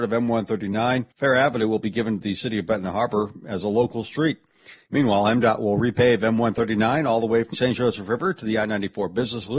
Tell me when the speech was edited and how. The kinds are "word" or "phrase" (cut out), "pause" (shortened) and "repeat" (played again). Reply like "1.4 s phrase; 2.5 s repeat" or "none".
1.1 s pause; 7.5 s word